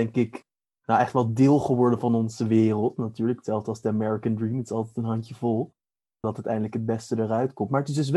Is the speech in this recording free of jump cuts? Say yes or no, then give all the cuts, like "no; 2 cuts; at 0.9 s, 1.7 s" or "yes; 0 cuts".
yes; 0 cuts